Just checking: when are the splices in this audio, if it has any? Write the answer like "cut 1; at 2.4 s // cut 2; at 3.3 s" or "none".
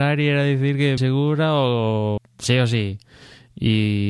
cut 1; at 1.0 s // cut 2; at 2.2 s